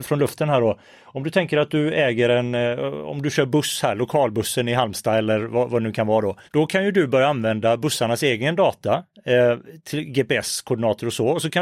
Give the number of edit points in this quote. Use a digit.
1